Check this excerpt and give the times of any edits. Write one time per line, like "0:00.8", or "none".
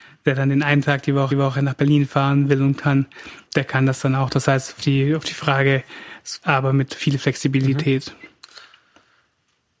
0:01.3
0:03.5
0:04.8
0:06.4